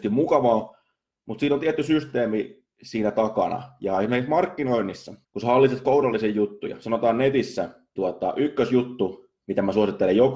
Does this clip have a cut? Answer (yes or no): yes